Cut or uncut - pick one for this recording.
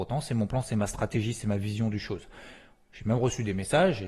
uncut